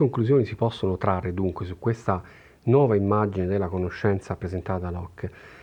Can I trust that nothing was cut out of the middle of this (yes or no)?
yes